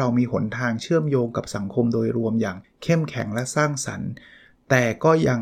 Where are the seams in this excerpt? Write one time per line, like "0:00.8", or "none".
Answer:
0:02.6